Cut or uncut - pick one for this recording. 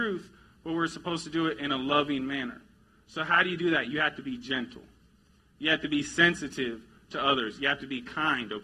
uncut